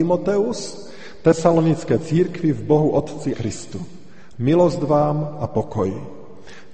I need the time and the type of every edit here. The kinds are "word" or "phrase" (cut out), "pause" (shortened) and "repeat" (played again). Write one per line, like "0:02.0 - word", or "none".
0:03.3 - phrase